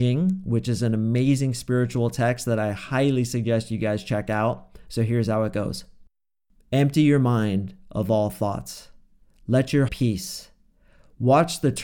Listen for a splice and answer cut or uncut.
cut